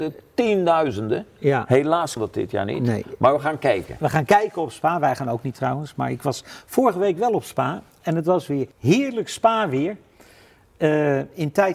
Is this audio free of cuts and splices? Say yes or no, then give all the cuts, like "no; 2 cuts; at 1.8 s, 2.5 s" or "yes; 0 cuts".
no; 2 cuts; at 2.2 s, 8.7 s